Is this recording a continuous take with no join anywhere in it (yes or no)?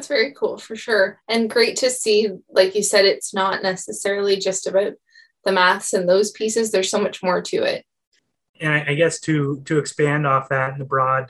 yes